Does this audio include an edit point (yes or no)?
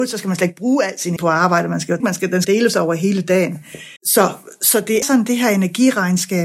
yes